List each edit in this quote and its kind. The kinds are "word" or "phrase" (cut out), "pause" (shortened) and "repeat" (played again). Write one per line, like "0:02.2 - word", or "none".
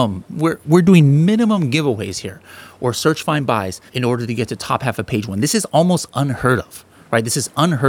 0:03.9 - pause

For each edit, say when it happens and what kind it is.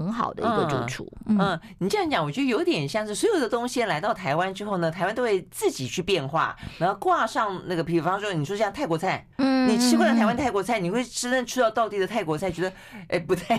0:09.3 - pause

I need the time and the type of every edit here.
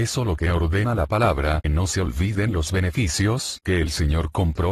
0:01.6 - word

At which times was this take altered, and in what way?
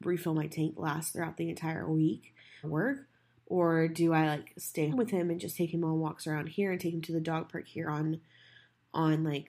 0:02.6 - word
0:04.9 - word

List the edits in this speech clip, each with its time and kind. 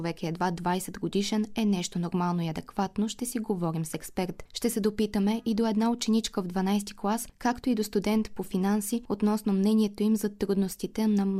none

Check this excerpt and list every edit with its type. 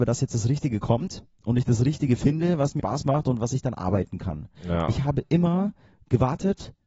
0:02.8 - word
0:04.6 - pause

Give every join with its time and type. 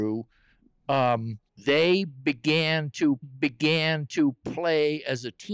0:01.5 - pause
0:03.2 - repeat

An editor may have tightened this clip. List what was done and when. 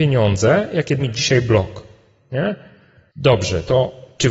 0:01.0 - word

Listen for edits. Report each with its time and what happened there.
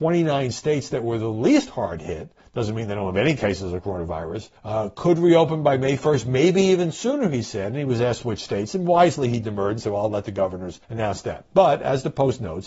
0:04.6 - pause
0:10.8 - pause

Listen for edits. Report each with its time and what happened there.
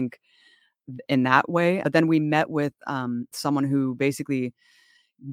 0:01.8 - word
0:03.3 - phrase

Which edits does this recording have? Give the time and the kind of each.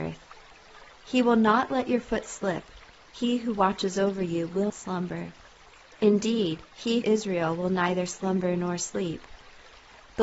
0:03.0 - pause
0:04.7 - word
0:07.0 - phrase

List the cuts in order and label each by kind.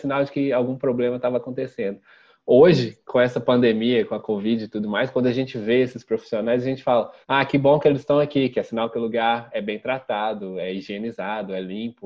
0:07.2 - pause

